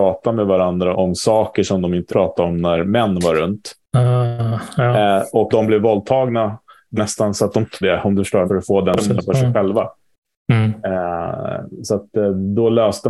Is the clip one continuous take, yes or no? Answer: no